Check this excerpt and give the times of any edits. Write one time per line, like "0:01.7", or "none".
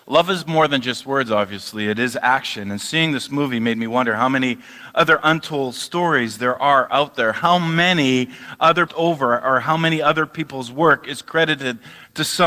0:08.9